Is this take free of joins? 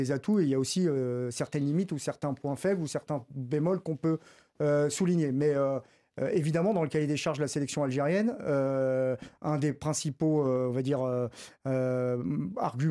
yes; 0 cuts

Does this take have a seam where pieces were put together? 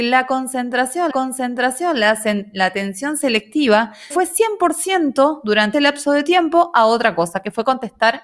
yes; 3 cuts; at 1.1 s, 4.1 s, 5.7 s

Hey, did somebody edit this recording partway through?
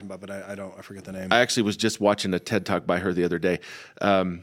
no; 0 cuts

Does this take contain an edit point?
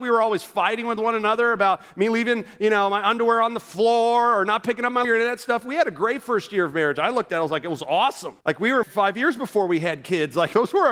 yes; 3 cuts; at 5.0 s, 8.4 s, 8.8 s

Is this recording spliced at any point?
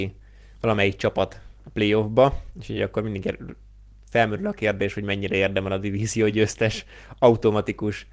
no; 0 cuts

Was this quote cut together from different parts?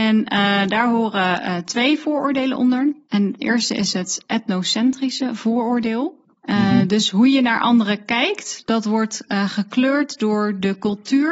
yes; 2 cuts; at 3.0 s, 6.3 s

